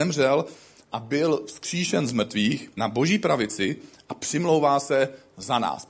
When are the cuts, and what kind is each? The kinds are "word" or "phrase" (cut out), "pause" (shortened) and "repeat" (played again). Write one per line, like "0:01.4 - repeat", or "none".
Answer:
0:02.8 - word